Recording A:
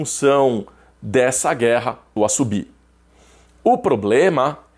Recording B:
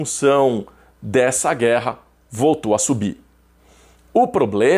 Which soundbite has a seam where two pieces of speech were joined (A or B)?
A